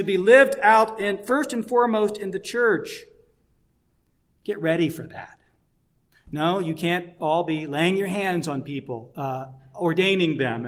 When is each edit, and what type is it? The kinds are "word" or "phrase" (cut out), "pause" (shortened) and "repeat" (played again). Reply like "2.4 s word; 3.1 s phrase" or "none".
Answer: none